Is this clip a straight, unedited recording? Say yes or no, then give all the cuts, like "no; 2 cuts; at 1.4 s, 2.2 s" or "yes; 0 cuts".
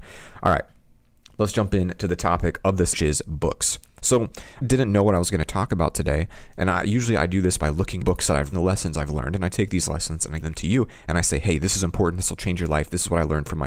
no; 5 cuts; at 2.9 s, 4.6 s, 8.0 s, 8.5 s, 10.4 s